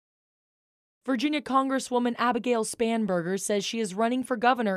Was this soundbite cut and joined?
no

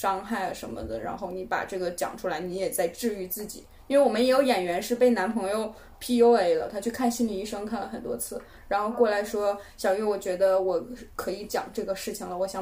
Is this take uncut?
yes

